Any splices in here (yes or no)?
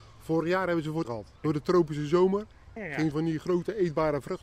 yes